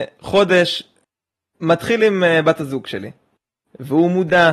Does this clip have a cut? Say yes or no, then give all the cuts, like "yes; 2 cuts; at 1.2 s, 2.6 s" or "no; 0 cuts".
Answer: no; 0 cuts